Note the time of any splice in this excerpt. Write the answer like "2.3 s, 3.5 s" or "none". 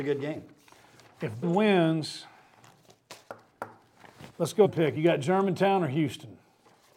1.4 s, 4.3 s, 4.6 s, 5.0 s